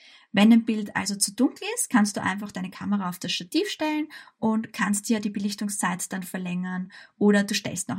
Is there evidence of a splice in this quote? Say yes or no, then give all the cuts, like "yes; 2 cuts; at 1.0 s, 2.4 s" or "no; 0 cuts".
no; 0 cuts